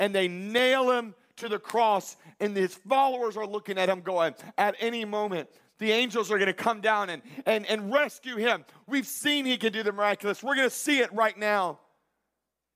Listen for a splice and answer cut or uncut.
uncut